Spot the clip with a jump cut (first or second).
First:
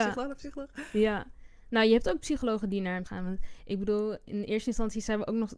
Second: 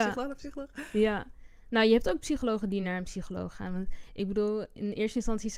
first